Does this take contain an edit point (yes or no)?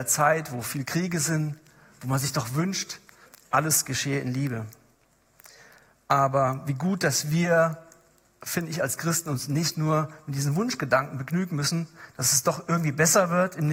no